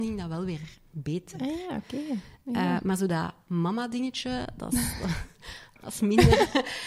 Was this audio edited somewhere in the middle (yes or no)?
no